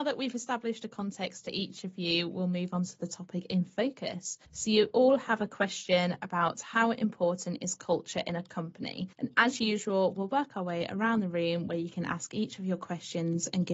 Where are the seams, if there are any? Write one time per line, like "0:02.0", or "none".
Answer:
0:04.5
0:09.1